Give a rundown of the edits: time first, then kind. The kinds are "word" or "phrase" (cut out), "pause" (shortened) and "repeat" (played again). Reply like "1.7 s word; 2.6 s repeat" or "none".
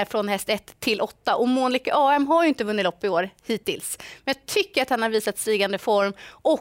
none